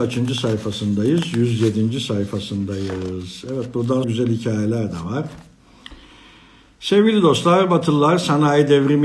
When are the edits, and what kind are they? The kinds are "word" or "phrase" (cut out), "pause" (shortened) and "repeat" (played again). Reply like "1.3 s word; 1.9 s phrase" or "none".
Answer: 4.0 s word